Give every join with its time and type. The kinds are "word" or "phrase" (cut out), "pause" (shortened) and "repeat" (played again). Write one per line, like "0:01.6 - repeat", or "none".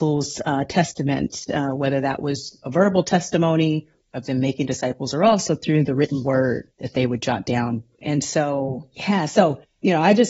none